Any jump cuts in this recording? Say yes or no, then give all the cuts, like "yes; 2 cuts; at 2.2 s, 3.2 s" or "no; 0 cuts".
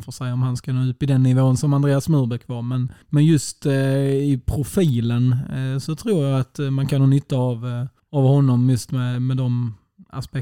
yes; 2 cuts; at 3.0 s, 8.0 s